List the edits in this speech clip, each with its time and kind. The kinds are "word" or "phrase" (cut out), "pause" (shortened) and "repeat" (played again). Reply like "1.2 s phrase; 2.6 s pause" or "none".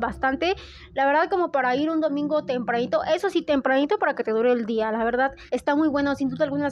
5.5 s pause